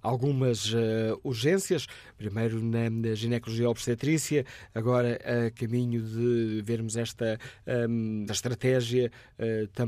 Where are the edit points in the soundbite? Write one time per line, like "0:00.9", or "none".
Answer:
0:08.3

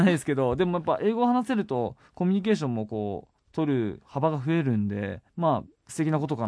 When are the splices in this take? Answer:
0:05.3

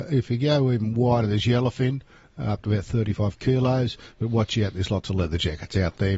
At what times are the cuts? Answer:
none

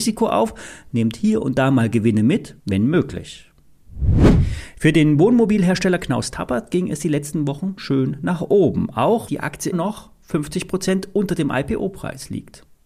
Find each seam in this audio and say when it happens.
0:02.6
0:07.8
0:09.3
0:09.7

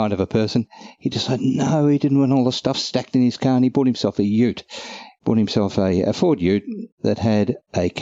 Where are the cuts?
none

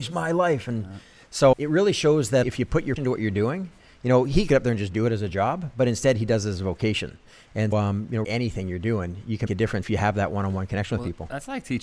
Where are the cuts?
0:01.5
0:02.4
0:03.0
0:04.5
0:07.7
0:08.2
0:09.5
0:09.8

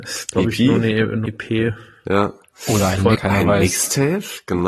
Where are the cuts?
0:01.2
0:03.1

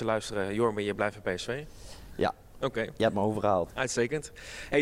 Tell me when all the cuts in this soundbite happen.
none

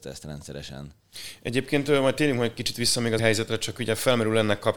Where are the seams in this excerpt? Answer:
0:03.2

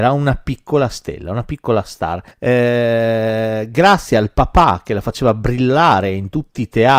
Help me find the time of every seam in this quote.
0:02.3

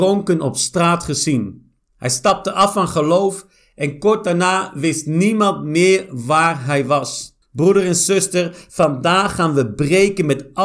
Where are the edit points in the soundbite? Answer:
0:01.8
0:07.4

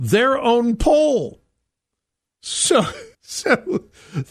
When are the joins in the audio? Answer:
0:03.1

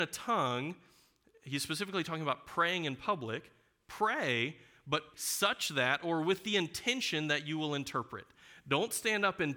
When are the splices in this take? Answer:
0:05.1

